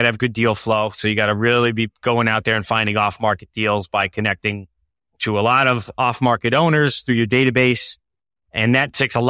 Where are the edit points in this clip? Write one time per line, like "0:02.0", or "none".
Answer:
none